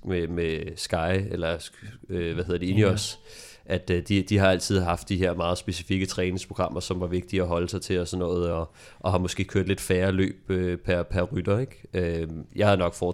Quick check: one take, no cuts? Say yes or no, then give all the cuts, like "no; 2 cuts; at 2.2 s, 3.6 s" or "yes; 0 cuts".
yes; 0 cuts